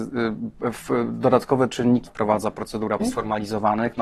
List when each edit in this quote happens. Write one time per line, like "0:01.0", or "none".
0:02.1
0:03.0